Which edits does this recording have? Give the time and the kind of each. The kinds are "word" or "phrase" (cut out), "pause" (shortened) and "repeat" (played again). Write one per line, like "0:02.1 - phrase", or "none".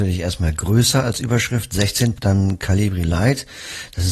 0:02.2 - word